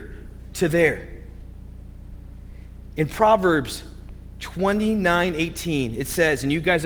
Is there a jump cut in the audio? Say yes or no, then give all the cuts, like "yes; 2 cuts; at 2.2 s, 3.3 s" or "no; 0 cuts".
no; 0 cuts